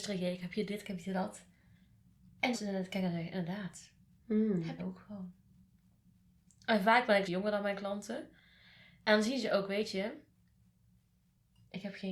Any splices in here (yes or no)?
yes